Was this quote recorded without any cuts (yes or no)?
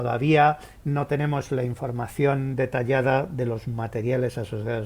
yes